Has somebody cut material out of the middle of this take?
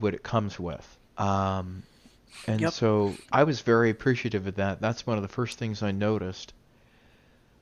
yes; 2 cuts; at 1.1 s, 3.2 s

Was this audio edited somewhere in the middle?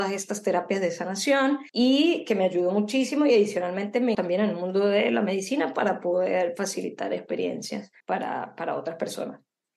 yes; 3 cuts; at 1.7 s, 4.1 s, 8.0 s

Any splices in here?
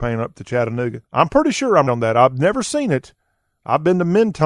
yes; 2 cuts; at 1.1 s, 1.9 s

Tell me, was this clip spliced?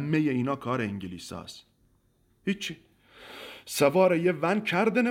no; 0 cuts

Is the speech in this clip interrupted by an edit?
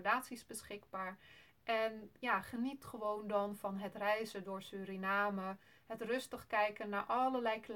no; 0 cuts

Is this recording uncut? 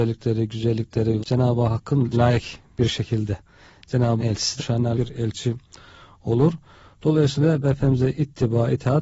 no; 6 cuts; at 1.2 s, 2.1 s, 4.2 s, 4.6 s, 4.9 s, 7.6 s

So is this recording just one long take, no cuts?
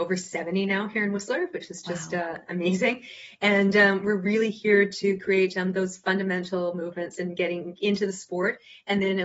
yes; 0 cuts

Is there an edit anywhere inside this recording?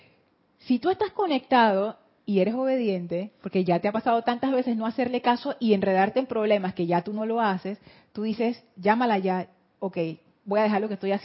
no; 0 cuts

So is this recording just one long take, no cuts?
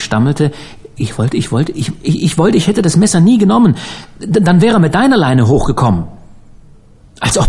yes; 0 cuts

